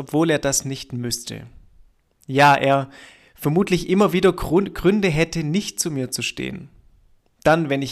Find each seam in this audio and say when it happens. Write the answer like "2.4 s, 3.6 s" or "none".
none